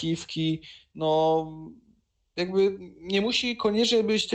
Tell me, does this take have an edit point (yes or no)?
no